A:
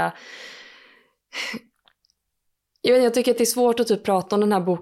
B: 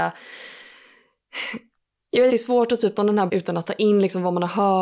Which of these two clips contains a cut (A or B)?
B